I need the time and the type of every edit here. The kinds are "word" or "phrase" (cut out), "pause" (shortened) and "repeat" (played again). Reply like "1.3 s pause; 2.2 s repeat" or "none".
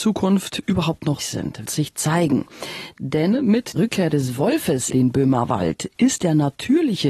1.2 s word; 1.6 s word; 3.8 s word; 4.9 s word